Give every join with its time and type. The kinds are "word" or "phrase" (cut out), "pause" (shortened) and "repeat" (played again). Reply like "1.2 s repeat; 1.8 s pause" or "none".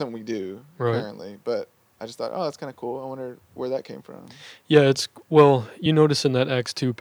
none